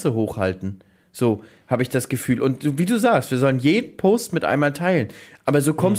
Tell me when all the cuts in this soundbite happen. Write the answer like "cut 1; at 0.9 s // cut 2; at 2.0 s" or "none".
none